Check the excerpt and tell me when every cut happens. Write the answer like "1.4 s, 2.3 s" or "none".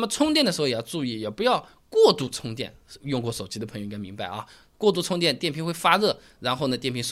none